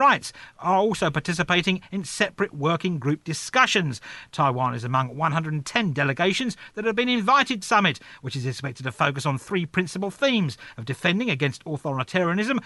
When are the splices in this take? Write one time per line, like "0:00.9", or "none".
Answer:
0:07.6